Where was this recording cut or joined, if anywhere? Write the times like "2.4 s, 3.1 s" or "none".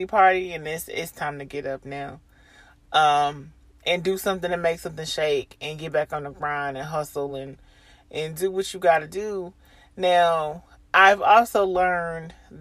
none